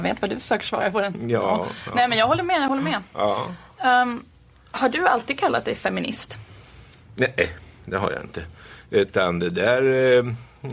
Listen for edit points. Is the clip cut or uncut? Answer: uncut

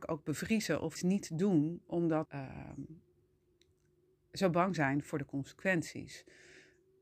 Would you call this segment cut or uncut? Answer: cut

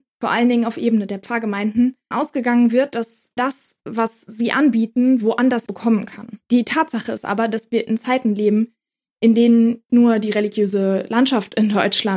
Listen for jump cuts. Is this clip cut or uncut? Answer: cut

